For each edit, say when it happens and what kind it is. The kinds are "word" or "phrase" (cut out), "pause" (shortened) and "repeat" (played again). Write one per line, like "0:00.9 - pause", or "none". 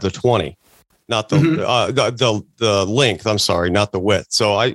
none